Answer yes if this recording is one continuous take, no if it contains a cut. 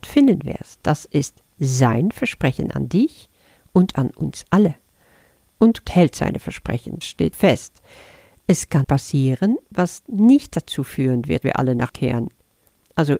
no